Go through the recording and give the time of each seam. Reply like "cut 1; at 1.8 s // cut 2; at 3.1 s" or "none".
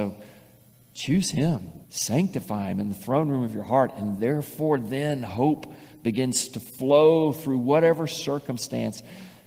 cut 1; at 1.8 s